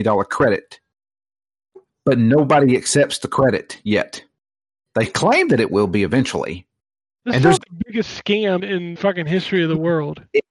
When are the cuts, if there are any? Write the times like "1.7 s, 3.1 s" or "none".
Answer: 7.6 s, 8.6 s, 9.0 s